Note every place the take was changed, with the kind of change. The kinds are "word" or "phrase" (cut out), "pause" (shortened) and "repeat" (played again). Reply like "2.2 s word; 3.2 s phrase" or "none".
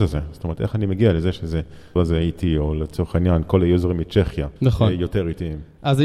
2.0 s word; 4.6 s pause